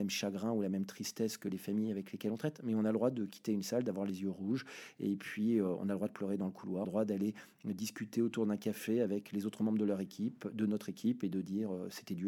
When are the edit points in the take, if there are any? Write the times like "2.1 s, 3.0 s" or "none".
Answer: 6.8 s

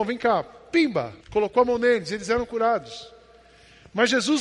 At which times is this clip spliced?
1.2 s

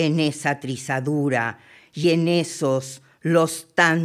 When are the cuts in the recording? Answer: none

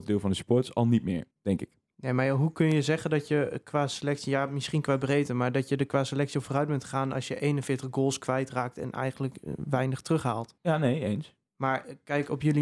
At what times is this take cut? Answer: 1.3 s, 10.6 s, 11.4 s

